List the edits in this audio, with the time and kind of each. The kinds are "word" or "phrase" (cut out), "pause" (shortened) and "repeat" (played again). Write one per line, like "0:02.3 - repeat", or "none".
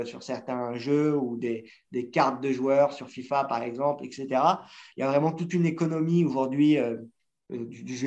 none

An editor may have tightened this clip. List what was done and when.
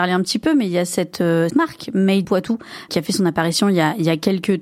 0:01.5 - word
0:02.2 - word
0:02.9 - word

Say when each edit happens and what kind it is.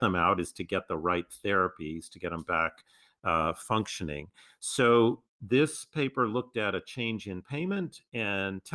none

